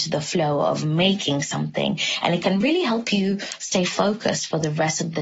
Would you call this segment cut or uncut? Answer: uncut